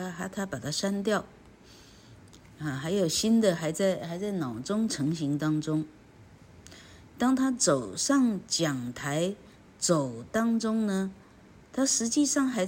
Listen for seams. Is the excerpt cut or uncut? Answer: uncut